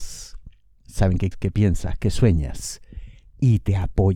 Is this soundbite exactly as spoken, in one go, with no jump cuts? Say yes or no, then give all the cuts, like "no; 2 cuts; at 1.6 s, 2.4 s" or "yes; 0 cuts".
no; 1 cut; at 1.3 s